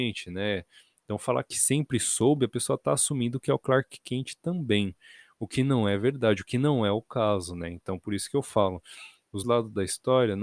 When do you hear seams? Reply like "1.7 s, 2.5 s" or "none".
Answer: 9.4 s